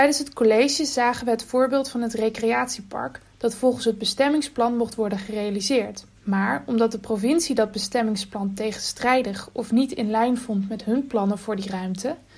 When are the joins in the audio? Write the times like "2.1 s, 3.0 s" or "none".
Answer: 6.2 s